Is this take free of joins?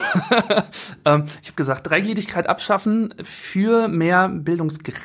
yes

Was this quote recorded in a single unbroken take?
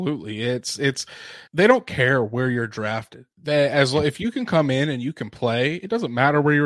no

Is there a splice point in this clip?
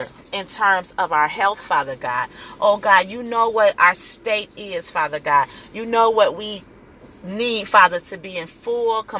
no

